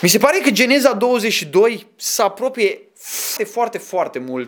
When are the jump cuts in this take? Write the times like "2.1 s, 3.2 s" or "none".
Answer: 3.4 s